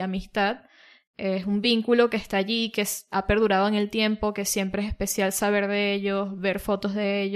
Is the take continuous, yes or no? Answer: yes